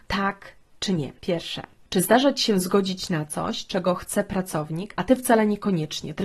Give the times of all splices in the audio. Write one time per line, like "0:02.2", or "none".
0:01.2